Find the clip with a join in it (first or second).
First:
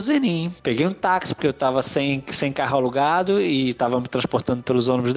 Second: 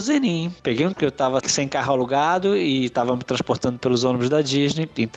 second